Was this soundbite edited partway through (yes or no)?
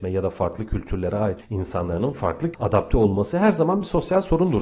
yes